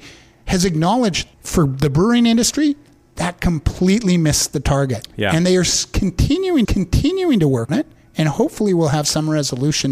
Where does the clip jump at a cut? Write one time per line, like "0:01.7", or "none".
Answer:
0:01.3
0:06.6
0:07.7